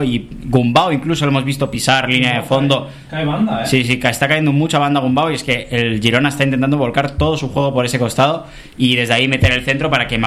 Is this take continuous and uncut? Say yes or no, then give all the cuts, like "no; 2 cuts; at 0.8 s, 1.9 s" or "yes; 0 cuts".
yes; 0 cuts